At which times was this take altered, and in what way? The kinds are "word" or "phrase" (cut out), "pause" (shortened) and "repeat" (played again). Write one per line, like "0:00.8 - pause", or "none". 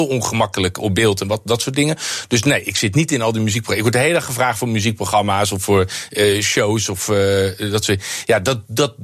none